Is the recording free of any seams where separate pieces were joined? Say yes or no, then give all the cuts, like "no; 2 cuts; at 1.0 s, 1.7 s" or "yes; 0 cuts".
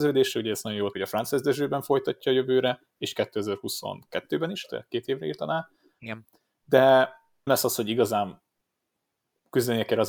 no; 2 cuts; at 0.9 s, 7.5 s